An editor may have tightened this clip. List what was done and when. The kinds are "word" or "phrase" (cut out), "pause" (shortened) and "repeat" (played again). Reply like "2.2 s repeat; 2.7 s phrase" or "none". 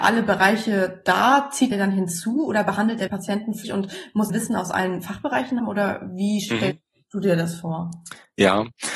1.7 s word; 3.1 s word; 3.6 s word; 4.3 s phrase; 5.6 s word